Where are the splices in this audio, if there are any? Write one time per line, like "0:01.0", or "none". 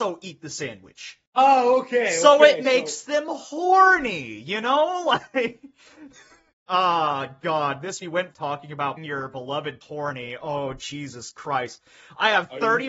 0:01.3
0:06.5
0:08.0
0:08.3
0:09.0
0:09.8